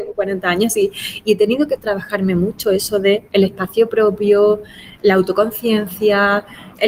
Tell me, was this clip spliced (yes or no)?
no